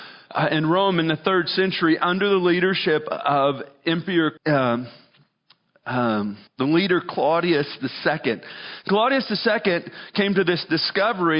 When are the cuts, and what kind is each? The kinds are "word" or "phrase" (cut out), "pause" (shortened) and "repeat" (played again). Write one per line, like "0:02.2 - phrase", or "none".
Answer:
0:04.4 - pause
0:06.5 - pause